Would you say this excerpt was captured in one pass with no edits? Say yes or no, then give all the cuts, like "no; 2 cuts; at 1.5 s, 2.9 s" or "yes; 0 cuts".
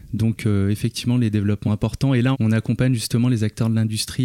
no; 2 cuts; at 1.7 s, 2.3 s